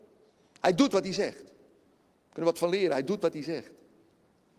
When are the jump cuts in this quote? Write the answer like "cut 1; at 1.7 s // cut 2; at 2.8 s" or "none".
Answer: none